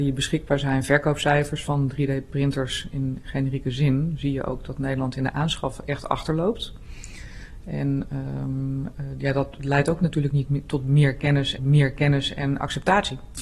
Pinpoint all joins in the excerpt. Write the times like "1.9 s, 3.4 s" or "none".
11.6 s